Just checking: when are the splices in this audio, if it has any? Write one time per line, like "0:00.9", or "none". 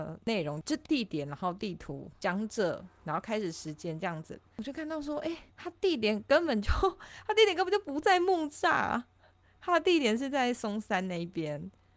0:05.5